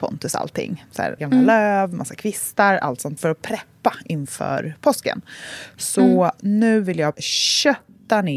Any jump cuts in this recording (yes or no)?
yes